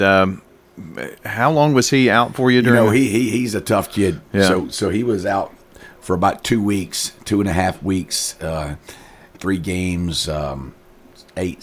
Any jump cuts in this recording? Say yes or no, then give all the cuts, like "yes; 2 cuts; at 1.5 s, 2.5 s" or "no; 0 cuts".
yes; 2 cuts; at 1.2 s, 9.4 s